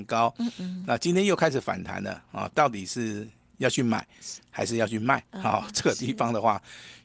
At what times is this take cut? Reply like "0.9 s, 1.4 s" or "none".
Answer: none